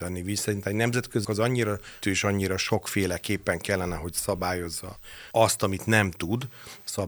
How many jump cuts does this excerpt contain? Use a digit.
3